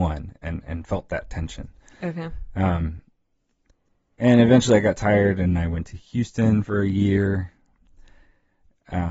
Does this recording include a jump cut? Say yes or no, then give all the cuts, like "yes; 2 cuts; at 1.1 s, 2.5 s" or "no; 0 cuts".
no; 0 cuts